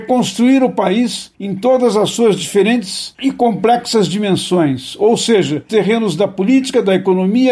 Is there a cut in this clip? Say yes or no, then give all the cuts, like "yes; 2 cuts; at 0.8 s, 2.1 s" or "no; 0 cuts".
yes; 1 cut; at 5.7 s